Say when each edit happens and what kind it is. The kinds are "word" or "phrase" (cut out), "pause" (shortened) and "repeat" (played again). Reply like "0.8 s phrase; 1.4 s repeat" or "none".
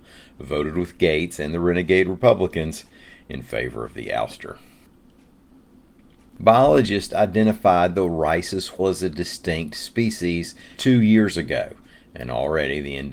8.8 s word; 10.8 s word